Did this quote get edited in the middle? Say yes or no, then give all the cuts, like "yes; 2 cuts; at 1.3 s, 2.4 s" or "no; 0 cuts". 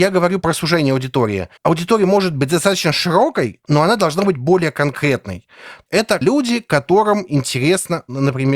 yes; 2 cuts; at 5.9 s, 6.2 s